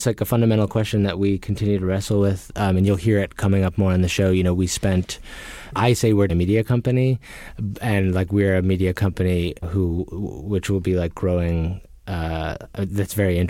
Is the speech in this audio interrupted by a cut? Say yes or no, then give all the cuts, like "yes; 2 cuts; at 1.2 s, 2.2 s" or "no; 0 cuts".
yes; 2 cuts; at 6.3 s, 9.6 s